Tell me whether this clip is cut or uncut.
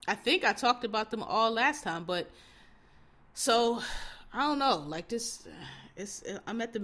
uncut